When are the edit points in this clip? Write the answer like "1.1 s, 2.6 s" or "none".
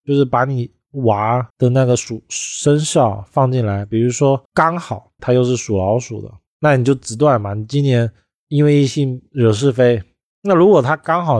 1.5 s, 4.5 s, 5.2 s